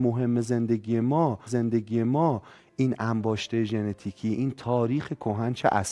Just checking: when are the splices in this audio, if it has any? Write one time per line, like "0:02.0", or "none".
0:01.5